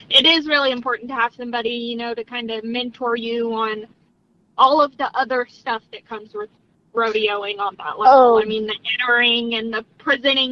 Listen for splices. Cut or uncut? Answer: uncut